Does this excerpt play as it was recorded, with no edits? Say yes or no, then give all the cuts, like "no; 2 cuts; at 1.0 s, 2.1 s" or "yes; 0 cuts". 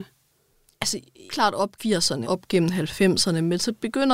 no; 3 cuts; at 1.3 s, 1.8 s, 2.2 s